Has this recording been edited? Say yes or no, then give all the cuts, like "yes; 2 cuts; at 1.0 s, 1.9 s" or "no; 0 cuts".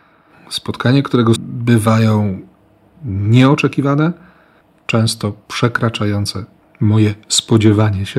yes; 1 cut; at 1.4 s